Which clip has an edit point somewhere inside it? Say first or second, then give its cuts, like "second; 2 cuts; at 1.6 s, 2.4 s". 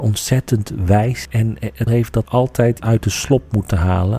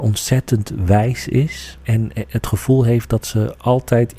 first; 4 cuts; at 1.2 s, 1.9 s, 2.2 s, 2.8 s